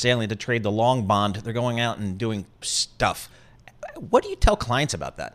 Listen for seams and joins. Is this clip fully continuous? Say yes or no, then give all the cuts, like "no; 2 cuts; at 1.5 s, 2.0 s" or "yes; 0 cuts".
no; 1 cut; at 2.6 s